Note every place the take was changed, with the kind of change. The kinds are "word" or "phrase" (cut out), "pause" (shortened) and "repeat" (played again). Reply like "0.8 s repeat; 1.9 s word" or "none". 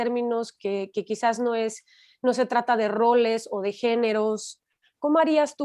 none